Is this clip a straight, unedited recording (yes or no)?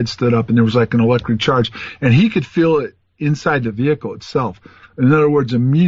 yes